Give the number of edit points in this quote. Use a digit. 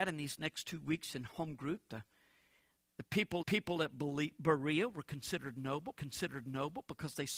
2